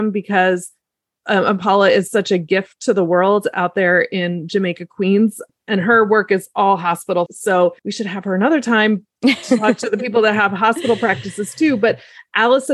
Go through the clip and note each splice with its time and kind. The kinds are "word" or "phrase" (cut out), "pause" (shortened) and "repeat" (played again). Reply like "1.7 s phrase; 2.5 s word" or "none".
7.3 s word; 7.8 s pause